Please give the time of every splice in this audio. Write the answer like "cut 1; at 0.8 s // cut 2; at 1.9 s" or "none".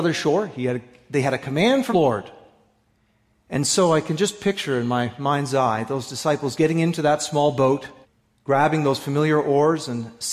cut 1; at 1.9 s // cut 2; at 8.0 s